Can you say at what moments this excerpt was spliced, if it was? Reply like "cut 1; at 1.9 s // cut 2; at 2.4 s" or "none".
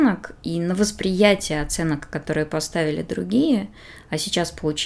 none